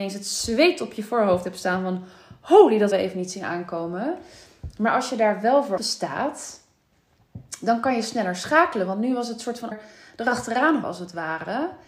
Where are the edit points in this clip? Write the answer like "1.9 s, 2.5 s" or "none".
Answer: 2.9 s, 5.8 s, 9.7 s, 10.8 s